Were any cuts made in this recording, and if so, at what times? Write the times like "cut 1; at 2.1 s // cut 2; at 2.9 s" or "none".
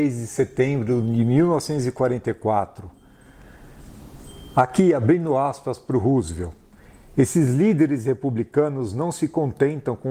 none